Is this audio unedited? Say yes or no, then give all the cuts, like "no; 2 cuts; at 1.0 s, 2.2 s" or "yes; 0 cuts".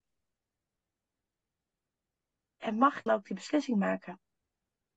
no; 1 cut; at 3.1 s